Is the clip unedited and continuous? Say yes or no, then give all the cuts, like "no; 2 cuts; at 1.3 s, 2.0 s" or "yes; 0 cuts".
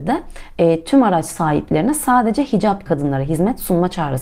no; 1 cut; at 2.9 s